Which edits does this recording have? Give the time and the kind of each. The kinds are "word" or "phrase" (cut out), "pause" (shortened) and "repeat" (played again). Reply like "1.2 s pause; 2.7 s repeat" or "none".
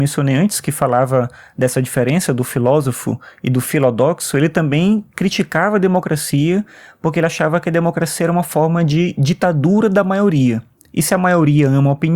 none